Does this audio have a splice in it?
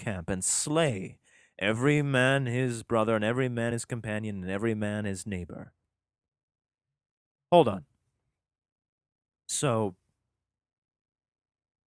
no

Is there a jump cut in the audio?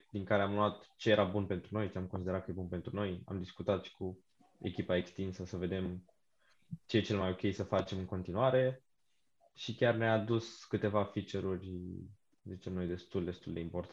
no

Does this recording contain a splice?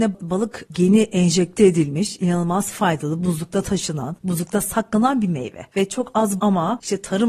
yes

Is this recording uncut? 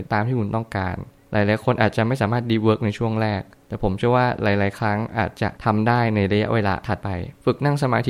yes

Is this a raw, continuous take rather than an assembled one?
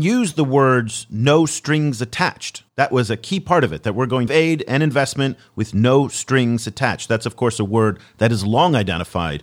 no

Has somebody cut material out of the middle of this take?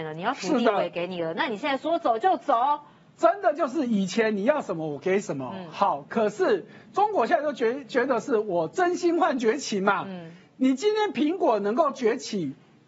no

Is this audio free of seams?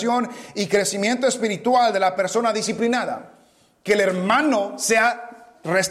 yes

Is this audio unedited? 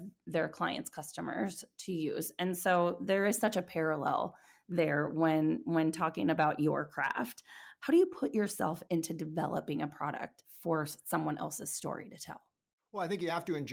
yes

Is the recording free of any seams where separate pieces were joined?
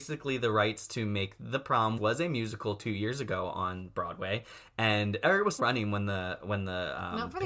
no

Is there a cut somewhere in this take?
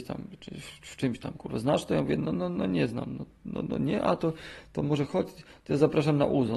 no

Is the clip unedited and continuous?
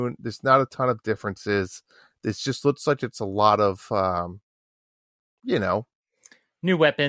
yes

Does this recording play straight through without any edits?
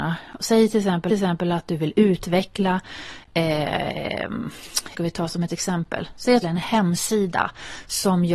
no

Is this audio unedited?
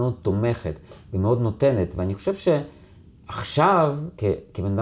yes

